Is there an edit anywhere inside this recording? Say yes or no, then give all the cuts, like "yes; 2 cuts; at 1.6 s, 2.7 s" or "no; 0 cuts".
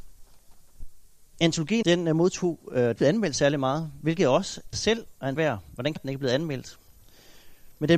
yes; 5 cuts; at 1.8 s, 3.0 s, 4.7 s, 5.4 s, 6.0 s